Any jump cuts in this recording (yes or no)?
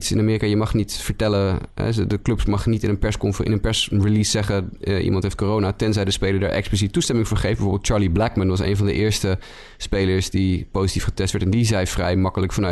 no